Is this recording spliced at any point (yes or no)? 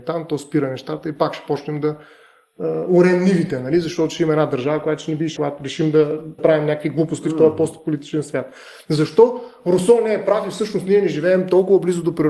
yes